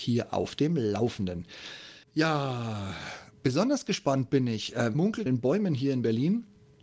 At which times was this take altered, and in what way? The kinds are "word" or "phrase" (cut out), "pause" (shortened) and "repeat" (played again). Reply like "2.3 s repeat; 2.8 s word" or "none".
2.0 s pause; 4.9 s word; 5.3 s phrase